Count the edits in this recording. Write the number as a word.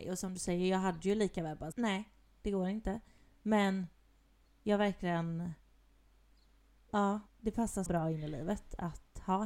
three